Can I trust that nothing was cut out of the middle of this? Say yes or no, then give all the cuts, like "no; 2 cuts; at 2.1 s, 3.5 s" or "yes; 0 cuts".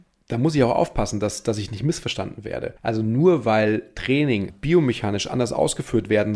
no; 2 cuts; at 2.8 s, 4.5 s